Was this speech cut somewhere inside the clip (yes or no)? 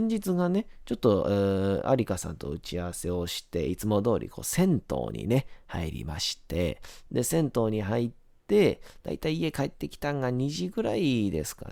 no